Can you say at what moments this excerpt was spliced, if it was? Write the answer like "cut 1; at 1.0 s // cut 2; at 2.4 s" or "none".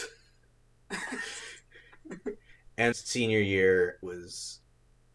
cut 1; at 2.9 s // cut 2; at 4.0 s